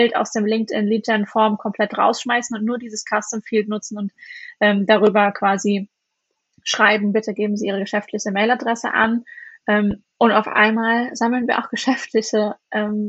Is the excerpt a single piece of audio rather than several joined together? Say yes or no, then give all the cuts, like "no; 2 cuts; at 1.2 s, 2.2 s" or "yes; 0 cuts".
yes; 0 cuts